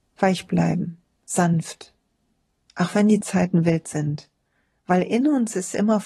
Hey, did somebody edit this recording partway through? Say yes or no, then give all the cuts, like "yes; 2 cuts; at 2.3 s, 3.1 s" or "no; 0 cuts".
no; 0 cuts